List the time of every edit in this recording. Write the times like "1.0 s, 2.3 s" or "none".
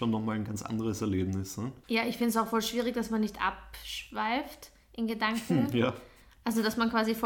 none

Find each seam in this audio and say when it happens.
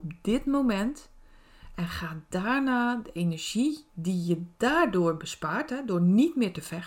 3.9 s

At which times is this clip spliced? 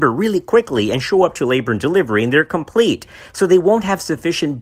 none

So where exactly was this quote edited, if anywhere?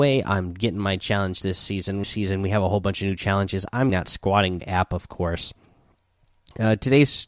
1.4 s, 2.0 s, 3.9 s, 4.6 s

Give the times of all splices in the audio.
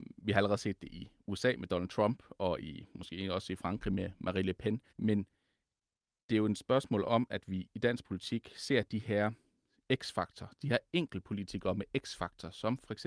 4.9 s

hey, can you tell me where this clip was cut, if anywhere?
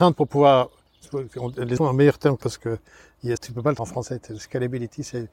1.8 s, 2.4 s, 3.4 s, 3.8 s

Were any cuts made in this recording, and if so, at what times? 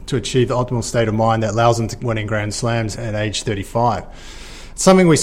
2.0 s, 2.9 s

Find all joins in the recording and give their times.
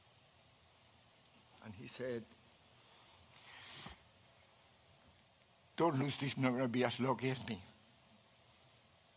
6.4 s

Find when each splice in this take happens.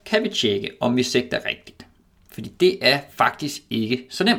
none

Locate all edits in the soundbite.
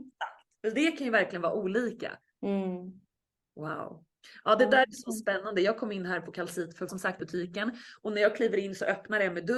2.2 s, 6.9 s, 7.2 s

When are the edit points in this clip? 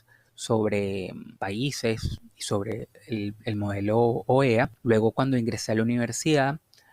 1.4 s, 4.8 s

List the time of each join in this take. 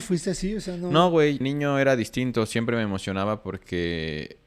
1.4 s

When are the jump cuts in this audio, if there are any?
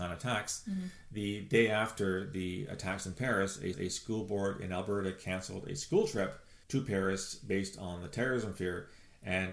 3.7 s, 6.6 s

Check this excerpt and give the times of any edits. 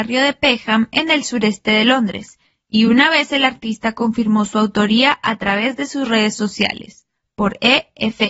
none

